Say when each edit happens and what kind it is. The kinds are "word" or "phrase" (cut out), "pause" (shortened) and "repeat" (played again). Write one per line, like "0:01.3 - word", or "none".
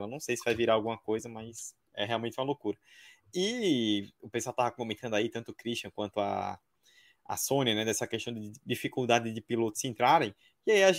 none